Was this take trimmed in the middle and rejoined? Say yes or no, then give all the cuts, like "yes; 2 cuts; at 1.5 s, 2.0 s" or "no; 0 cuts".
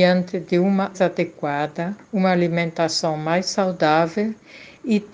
yes; 1 cut; at 0.9 s